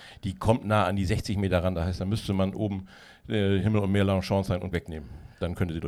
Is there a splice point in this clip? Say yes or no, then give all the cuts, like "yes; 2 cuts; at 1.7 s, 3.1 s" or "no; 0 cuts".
yes; 1 cut; at 4.7 s